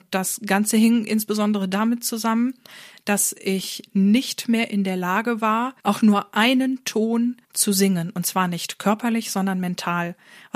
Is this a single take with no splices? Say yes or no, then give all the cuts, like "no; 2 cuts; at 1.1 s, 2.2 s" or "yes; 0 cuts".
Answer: no; 2 cuts; at 5.8 s, 7.4 s